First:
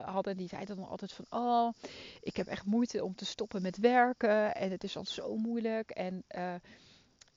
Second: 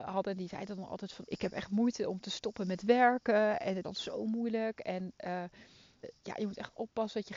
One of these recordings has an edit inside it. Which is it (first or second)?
second